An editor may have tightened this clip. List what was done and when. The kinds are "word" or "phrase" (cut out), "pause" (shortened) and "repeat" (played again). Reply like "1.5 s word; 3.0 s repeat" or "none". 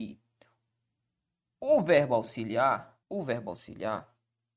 3.0 s pause